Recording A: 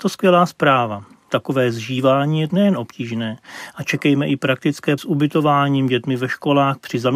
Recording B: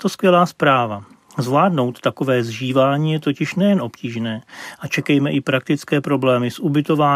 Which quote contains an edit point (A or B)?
A